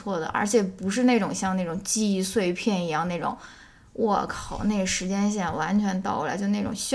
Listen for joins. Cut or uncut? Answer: uncut